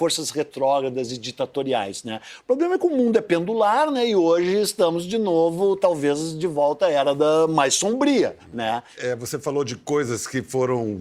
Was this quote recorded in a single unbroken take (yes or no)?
no